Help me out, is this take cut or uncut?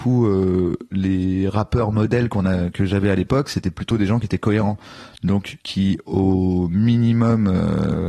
cut